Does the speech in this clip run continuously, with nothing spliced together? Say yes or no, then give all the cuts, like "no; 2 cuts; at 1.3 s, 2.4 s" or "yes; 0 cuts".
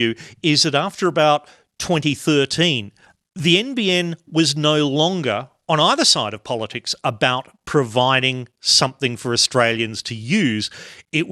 yes; 0 cuts